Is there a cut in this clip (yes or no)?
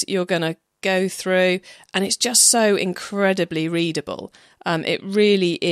no